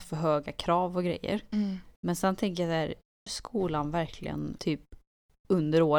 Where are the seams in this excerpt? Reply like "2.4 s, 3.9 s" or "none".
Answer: 2.0 s, 3.3 s, 4.6 s